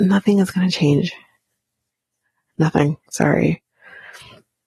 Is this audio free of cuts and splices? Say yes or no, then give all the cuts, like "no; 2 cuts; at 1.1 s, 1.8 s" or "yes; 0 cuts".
yes; 0 cuts